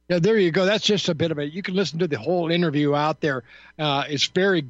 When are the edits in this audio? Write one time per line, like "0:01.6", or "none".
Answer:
none